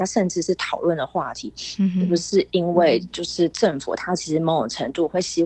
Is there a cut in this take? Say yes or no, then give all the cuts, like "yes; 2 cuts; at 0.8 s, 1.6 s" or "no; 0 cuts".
no; 0 cuts